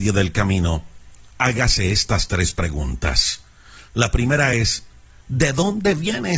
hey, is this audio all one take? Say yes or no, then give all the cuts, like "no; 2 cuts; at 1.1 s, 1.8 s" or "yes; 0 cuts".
yes; 0 cuts